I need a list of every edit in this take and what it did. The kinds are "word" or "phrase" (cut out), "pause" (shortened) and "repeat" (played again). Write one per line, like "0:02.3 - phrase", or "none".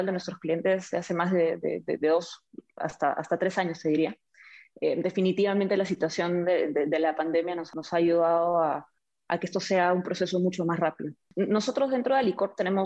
none